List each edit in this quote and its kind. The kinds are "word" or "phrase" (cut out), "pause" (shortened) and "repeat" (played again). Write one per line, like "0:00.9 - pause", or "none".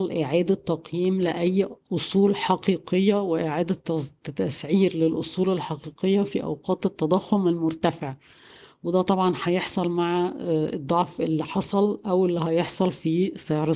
none